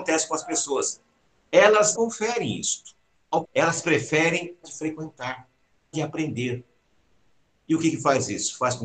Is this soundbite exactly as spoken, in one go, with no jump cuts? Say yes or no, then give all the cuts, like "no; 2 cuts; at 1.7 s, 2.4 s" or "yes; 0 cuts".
no; 4 cuts; at 1.9 s, 3.4 s, 4.6 s, 5.9 s